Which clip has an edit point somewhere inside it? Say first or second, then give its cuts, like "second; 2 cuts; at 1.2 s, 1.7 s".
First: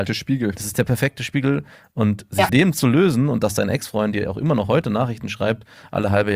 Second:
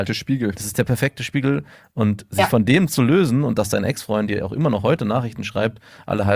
first; 1 cut; at 2.5 s